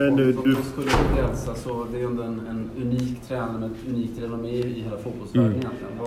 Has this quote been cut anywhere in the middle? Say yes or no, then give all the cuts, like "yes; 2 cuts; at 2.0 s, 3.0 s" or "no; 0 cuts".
no; 0 cuts